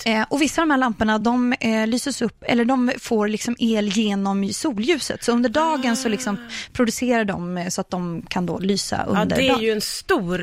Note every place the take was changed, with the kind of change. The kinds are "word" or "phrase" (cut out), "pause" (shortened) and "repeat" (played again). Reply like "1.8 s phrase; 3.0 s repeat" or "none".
none